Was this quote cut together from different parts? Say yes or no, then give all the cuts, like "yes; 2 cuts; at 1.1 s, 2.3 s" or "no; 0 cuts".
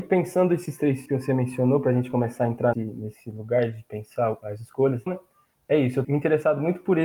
yes; 4 cuts; at 1.1 s, 2.7 s, 5.1 s, 6.0 s